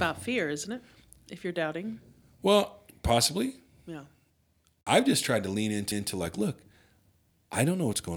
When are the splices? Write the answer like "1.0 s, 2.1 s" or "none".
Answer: 5.9 s